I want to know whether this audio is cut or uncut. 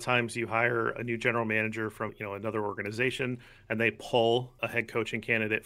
cut